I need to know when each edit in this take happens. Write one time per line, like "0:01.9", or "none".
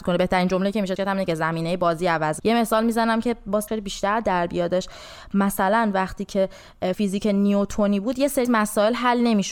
0:01.0
0:02.4
0:03.7
0:06.9
0:08.4